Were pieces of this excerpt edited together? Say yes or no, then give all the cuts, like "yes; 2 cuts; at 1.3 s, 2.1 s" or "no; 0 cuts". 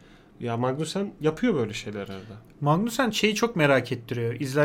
no; 0 cuts